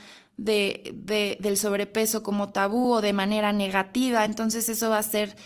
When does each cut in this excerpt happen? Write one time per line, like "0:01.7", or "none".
none